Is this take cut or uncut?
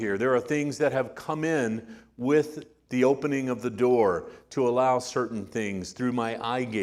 uncut